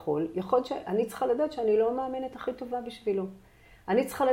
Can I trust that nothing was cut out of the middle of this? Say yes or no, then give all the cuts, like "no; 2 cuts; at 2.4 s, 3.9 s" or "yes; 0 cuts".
yes; 0 cuts